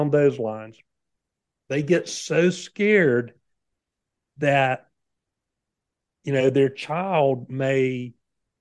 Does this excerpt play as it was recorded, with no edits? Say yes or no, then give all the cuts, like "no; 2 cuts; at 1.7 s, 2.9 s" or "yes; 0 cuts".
yes; 0 cuts